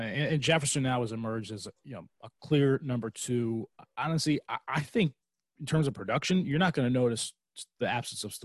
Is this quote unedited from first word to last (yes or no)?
yes